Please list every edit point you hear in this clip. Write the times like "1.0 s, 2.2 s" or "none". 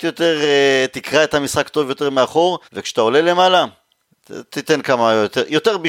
2.6 s